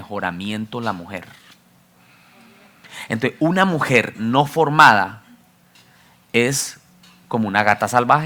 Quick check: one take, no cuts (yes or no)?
yes